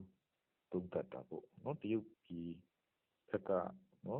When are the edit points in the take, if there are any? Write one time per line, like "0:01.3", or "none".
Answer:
0:02.1